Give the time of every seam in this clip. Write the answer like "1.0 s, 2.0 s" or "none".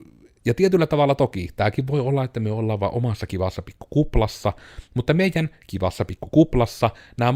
none